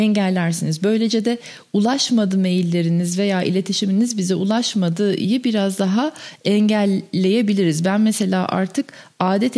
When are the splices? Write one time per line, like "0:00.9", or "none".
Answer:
none